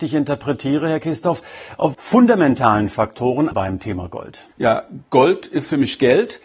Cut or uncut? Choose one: cut